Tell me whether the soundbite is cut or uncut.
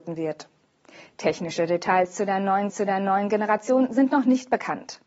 cut